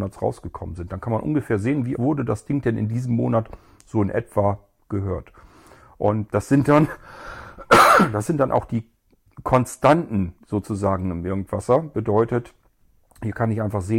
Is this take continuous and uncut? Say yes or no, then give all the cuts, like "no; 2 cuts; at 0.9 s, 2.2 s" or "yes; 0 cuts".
no; 2 cuts; at 1.9 s, 6.3 s